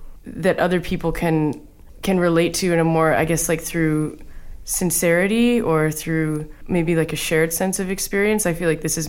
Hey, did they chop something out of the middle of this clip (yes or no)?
no